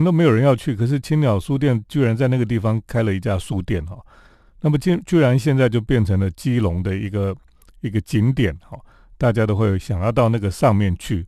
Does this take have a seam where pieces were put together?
no; 0 cuts

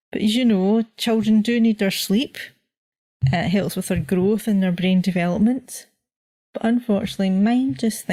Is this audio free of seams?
yes; 0 cuts

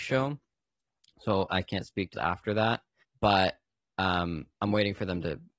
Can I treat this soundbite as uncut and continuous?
no; 2 cuts; at 2.1 s, 3.0 s

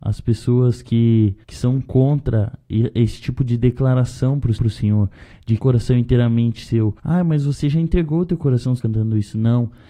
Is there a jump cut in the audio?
yes; 5 cuts; at 1.4 s, 4.6 s, 5.6 s, 7.0 s, 8.8 s

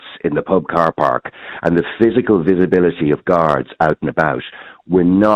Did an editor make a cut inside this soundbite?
no; 0 cuts

